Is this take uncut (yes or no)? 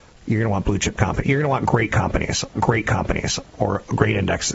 no